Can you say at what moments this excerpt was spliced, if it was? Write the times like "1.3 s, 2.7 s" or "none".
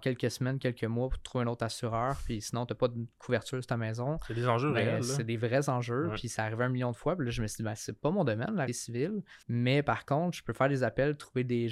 8.7 s, 9.4 s